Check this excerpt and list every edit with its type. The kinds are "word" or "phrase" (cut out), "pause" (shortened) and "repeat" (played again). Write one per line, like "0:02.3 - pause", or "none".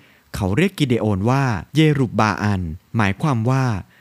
0:01.7 - pause
0:02.9 - pause